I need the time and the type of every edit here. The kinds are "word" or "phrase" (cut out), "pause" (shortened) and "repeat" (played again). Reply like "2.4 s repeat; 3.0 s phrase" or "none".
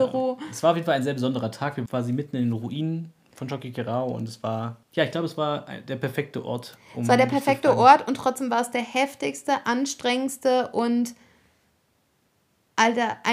1.9 s word; 4.8 s pause